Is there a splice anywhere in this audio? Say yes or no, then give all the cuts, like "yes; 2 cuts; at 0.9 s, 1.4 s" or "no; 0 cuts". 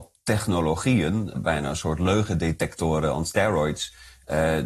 yes; 1 cut; at 1.3 s